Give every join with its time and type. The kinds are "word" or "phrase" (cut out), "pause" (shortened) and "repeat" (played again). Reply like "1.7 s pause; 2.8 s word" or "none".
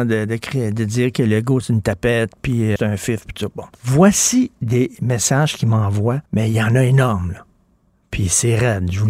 2.8 s word; 3.7 s pause; 6.3 s pause